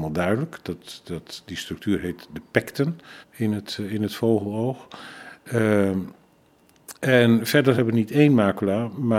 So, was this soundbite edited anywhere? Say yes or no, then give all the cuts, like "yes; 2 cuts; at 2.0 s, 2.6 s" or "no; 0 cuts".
yes; 3 cuts; at 3.2 s, 7.0 s, 7.8 s